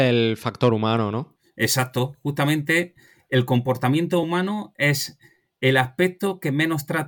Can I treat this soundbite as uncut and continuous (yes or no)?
yes